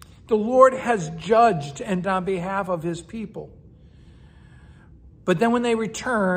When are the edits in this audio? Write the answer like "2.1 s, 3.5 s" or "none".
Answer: 2.0 s